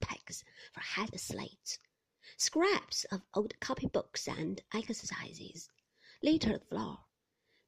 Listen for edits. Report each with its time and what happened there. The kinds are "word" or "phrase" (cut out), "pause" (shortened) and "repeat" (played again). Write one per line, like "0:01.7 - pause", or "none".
0:01.1 - word
0:06.6 - word